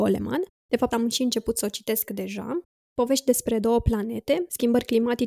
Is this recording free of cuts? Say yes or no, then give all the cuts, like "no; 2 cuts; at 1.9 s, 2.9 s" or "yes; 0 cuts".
no; 1 cut; at 0.9 s